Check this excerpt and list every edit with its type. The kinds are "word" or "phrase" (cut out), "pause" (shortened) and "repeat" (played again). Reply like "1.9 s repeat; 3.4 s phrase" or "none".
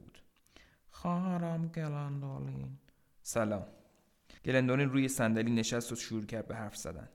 4.4 s pause